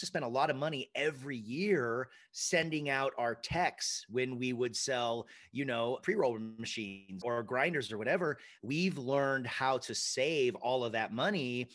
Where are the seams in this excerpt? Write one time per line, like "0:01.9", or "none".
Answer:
0:06.0
0:07.2